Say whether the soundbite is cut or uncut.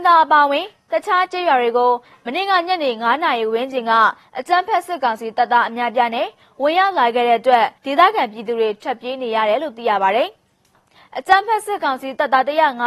cut